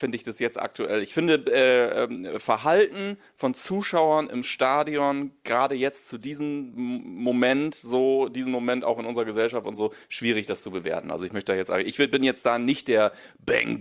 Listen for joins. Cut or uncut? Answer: uncut